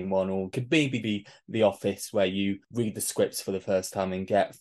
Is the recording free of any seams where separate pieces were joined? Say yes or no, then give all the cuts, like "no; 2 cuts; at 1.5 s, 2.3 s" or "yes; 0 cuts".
no; 1 cut; at 1.0 s